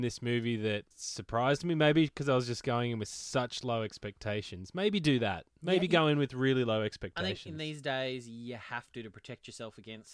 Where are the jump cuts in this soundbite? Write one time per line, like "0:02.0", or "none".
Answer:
0:00.9